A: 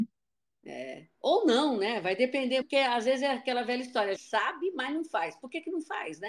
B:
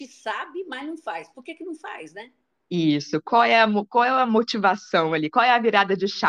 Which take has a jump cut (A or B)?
A